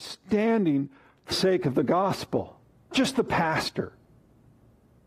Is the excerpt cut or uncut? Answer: cut